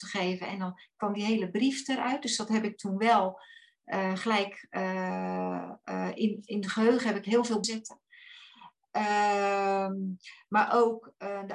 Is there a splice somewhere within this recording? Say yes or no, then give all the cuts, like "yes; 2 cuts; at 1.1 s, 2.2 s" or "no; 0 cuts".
yes; 1 cut; at 7.6 s